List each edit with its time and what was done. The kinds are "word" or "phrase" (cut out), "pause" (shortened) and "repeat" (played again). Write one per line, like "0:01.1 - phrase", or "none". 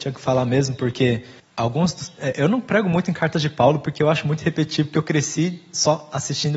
0:01.4 - pause